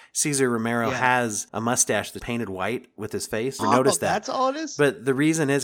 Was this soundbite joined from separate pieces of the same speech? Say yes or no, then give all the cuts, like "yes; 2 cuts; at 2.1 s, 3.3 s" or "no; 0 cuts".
yes; 3 cuts; at 1.5 s, 2.2 s, 3.6 s